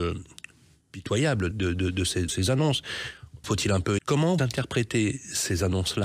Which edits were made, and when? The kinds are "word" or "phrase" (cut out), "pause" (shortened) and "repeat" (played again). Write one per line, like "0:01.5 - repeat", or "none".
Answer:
0:01.5 - word
0:02.3 - word
0:03.4 - word
0:04.0 - word
0:04.4 - word